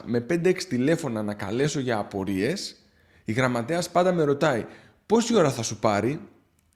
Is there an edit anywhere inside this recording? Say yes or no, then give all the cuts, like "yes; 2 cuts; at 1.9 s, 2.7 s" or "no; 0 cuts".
no; 0 cuts